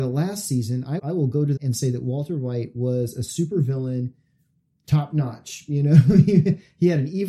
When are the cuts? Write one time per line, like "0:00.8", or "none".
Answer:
0:01.0
0:01.6